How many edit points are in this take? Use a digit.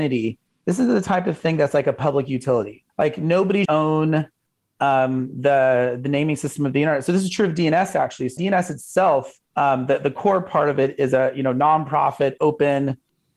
4